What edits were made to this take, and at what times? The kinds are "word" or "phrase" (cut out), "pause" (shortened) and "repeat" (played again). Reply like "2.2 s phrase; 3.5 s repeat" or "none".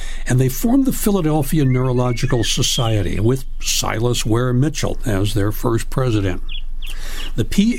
none